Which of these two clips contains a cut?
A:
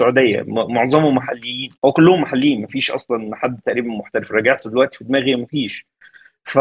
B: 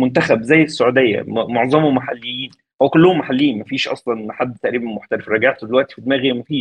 A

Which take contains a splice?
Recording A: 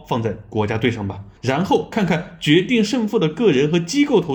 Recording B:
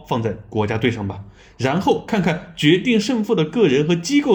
A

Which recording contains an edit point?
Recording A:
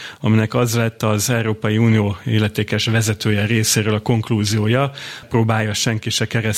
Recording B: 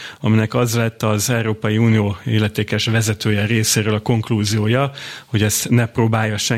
A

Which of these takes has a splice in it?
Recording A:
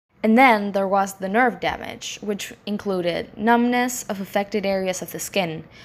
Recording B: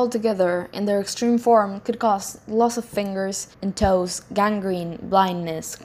B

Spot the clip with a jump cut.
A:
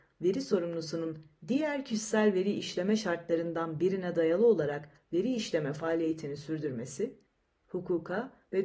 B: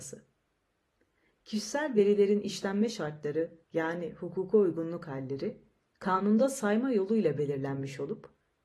B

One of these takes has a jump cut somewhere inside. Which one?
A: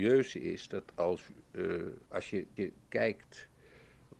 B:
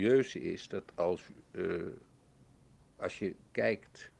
A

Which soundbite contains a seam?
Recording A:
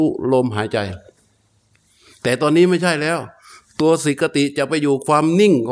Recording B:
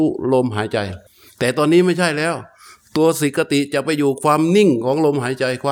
B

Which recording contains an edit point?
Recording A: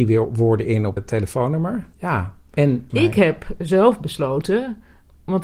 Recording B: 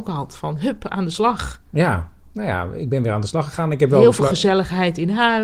A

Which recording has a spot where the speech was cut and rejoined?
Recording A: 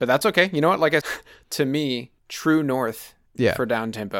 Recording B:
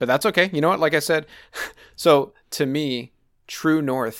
A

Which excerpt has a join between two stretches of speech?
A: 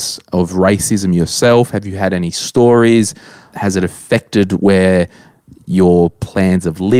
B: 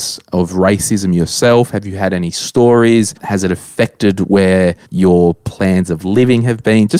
B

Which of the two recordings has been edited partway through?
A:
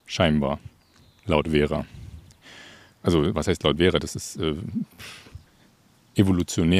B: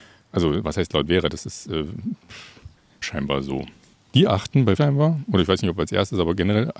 B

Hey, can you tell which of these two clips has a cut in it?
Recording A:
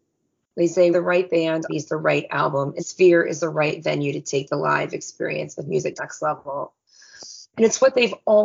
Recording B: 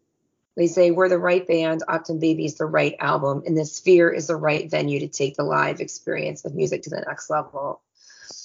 A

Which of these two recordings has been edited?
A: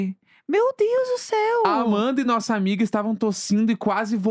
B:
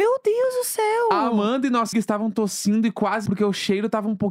B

